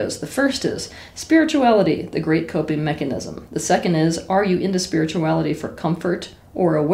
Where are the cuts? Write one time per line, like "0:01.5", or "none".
none

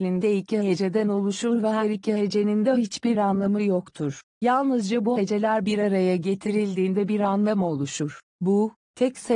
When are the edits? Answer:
none

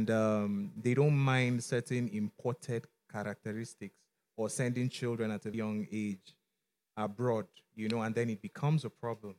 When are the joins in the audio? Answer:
0:05.5

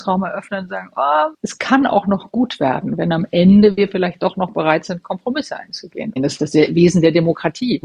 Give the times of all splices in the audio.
none

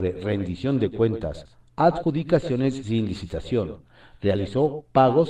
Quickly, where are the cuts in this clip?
none

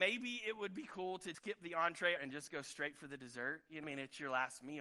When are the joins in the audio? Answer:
0:01.3
0:02.2
0:03.8

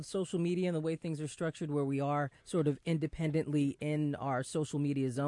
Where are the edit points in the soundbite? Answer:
0:02.4

